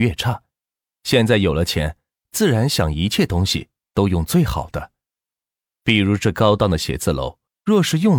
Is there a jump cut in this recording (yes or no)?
no